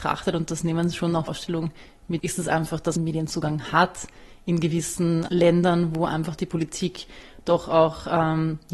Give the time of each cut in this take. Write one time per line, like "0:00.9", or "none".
0:01.3
0:02.2
0:03.0
0:05.3